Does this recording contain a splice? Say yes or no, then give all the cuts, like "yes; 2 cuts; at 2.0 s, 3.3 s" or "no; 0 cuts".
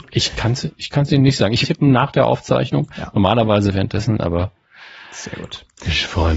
yes; 1 cut; at 1.6 s